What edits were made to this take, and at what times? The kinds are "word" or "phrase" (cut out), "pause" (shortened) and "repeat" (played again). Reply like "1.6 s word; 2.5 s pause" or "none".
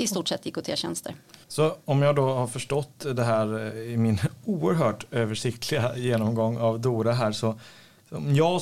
1.4 s pause